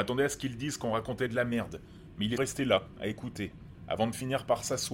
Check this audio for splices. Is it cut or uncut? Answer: cut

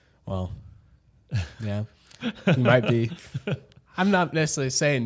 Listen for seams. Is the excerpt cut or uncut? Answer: uncut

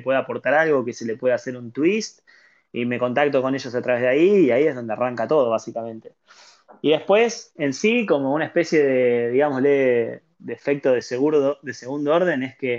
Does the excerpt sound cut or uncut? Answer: cut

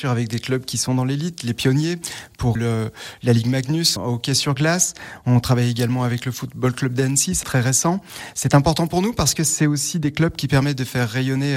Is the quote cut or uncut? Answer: cut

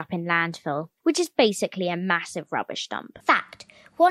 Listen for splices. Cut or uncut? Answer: cut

